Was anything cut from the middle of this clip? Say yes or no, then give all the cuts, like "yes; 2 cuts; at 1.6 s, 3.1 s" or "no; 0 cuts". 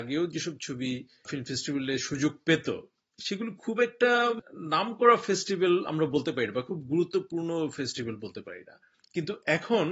no; 0 cuts